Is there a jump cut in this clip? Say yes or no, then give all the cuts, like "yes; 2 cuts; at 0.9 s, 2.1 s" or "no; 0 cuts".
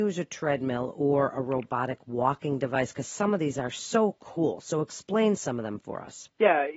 no; 0 cuts